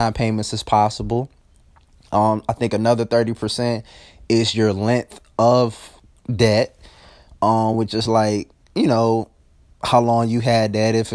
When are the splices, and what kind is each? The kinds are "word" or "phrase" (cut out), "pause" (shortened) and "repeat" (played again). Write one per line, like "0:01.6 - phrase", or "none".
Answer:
none